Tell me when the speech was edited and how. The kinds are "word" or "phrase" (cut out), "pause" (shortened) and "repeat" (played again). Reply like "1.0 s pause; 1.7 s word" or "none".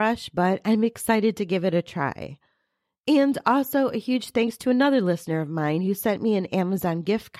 none